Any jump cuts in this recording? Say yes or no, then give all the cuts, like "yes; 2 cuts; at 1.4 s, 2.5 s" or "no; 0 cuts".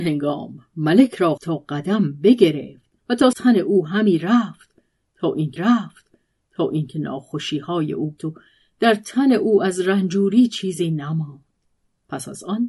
yes; 5 cuts; at 1.4 s, 3.0 s, 3.3 s, 5.6 s, 8.2 s